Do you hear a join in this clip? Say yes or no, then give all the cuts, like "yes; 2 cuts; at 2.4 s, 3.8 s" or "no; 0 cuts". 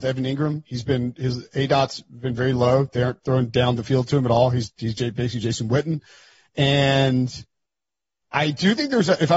no; 0 cuts